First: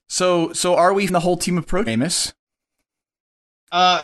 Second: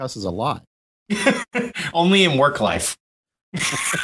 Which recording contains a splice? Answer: first; 2 cuts; at 1.1 s, 1.9 s

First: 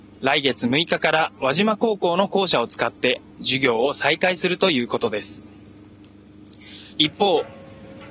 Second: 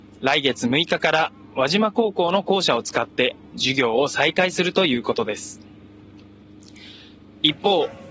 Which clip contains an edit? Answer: first; 2 cuts; at 1.3 s, 6.9 s

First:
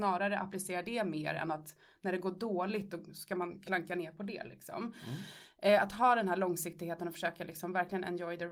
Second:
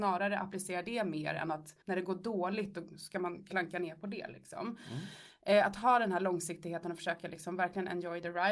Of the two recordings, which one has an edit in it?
second; 1 cut; at 1.8 s

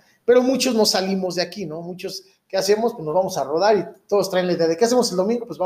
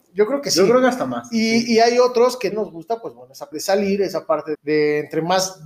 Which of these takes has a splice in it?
second; 3 cuts; at 2.5 s, 3.5 s, 4.5 s

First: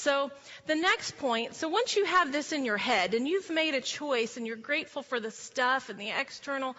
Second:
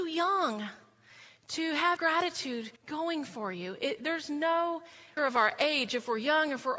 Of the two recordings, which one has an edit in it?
second; 3 cuts; at 2.0 s, 2.8 s, 5.2 s

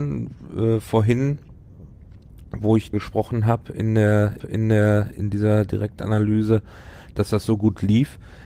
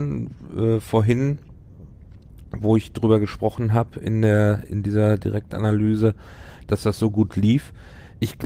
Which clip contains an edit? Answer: first; 2 cuts; at 2.9 s, 4.4 s

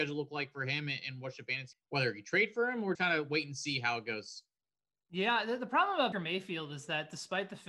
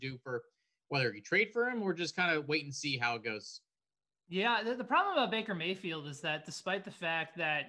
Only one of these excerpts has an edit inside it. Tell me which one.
first; 3 cuts; at 1.7 s, 2.9 s, 6.1 s

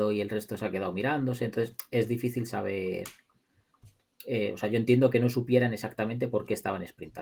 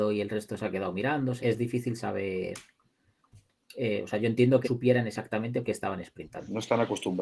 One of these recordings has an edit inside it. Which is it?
second; 3 cuts; at 1.4 s, 4.6 s, 5.6 s

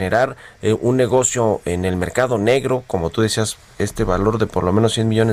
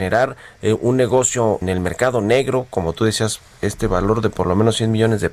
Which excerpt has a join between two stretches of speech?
second; 1 cut; at 1.6 s

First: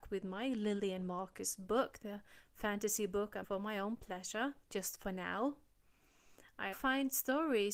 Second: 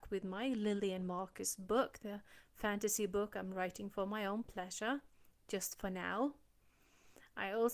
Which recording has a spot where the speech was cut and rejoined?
first; 3 cuts; at 3.4 s, 4.6 s, 6.7 s

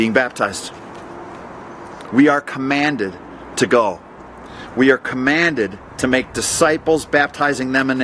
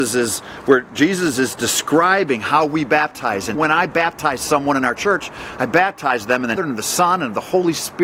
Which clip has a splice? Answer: second; 2 cuts; at 3.5 s, 6.6 s

